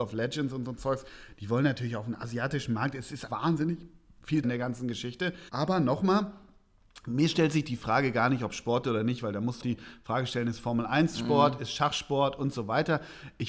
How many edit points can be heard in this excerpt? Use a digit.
4